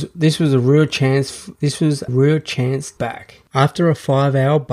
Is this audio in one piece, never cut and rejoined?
no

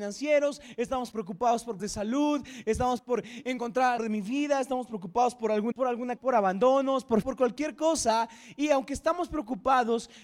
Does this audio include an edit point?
yes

